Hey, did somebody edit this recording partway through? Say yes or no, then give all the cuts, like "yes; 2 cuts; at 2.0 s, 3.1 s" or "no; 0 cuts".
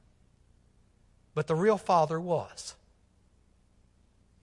no; 0 cuts